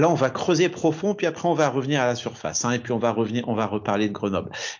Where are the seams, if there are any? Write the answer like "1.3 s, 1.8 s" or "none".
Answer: none